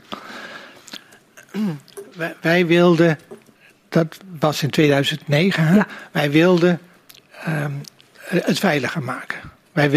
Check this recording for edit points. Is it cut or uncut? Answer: cut